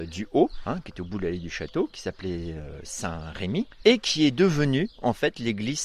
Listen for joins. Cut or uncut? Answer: uncut